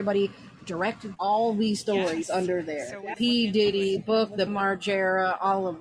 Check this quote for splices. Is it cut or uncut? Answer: cut